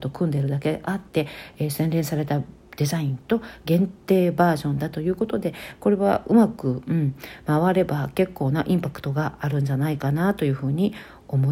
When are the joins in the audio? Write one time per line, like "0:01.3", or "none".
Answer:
0:01.1